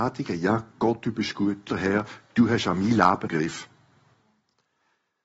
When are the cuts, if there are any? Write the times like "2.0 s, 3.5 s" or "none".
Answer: 1.7 s, 3.3 s